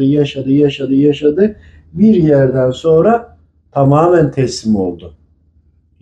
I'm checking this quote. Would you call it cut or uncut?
uncut